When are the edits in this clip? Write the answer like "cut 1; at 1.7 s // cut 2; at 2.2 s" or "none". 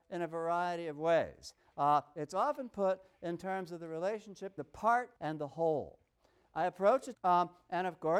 cut 1; at 4.6 s // cut 2; at 5.2 s // cut 3; at 7.1 s